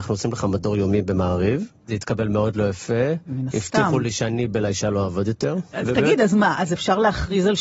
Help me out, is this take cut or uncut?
uncut